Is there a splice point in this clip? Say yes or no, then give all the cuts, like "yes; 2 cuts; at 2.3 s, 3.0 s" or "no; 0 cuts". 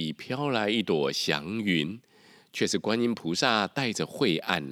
no; 0 cuts